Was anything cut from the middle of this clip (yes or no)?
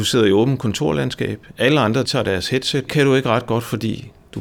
yes